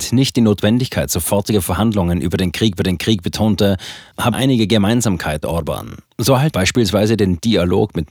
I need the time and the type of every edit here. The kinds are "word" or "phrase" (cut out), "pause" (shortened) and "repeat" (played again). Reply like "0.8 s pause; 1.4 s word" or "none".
2.8 s repeat; 4.3 s word; 5.4 s word; 6.5 s word